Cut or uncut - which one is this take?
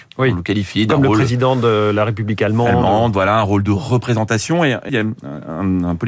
cut